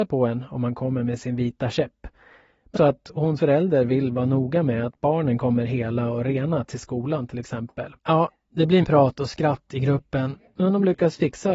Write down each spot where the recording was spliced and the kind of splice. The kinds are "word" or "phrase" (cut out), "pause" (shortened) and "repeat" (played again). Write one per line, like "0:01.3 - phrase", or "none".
0:02.8 - word
0:03.4 - word
0:08.0 - pause
0:08.8 - word